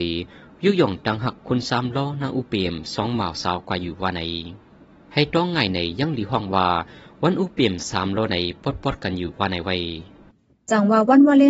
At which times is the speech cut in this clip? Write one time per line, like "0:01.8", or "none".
none

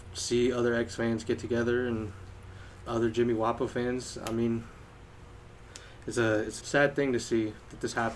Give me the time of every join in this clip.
0:02.9
0:06.6

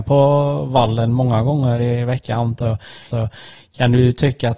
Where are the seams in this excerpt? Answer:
0:03.1

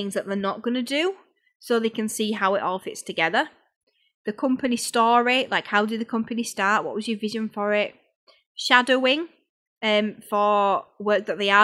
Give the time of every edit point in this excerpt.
none

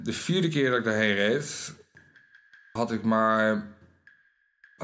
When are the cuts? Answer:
0:02.8

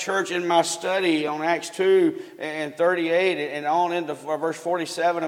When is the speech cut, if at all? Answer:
none

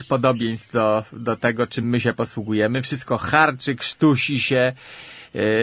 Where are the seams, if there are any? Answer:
none

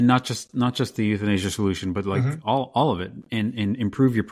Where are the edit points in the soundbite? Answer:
none

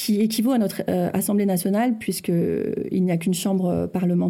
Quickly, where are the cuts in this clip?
none

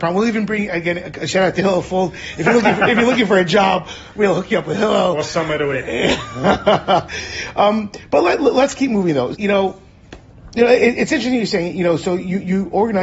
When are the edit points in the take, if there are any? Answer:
0:09.3

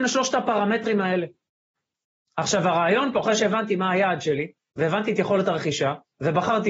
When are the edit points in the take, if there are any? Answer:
none

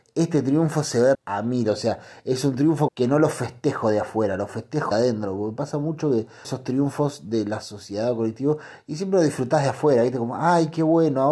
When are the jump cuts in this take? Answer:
0:01.1
0:02.9
0:04.9
0:06.4

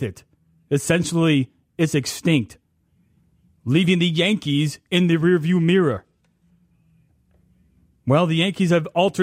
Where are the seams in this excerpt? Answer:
none

